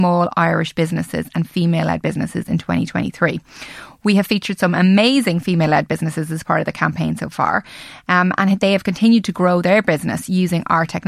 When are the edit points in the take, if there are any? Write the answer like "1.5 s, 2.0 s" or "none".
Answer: none